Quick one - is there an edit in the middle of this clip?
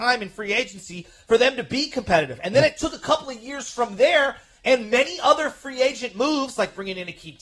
no; 0 cuts

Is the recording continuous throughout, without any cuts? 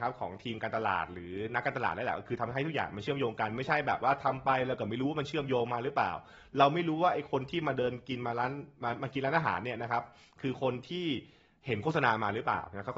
yes; 0 cuts

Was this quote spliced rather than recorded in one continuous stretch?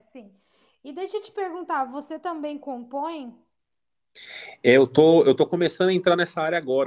no; 0 cuts

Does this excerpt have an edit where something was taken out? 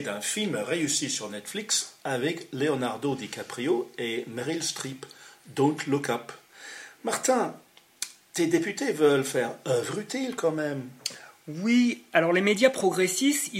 no; 0 cuts

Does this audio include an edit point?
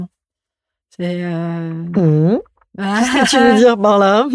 no; 0 cuts

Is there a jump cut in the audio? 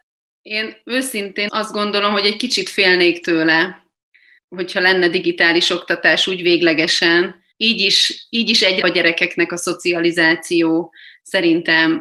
yes; 3 cuts; at 1.5 s, 4.4 s, 8.8 s

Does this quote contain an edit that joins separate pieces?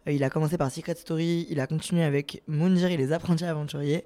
no; 0 cuts

